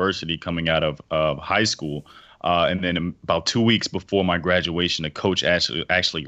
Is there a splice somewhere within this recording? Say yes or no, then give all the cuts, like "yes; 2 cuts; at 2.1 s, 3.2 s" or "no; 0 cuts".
no; 0 cuts